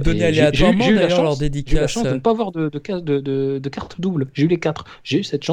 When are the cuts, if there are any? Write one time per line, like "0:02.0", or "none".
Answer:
none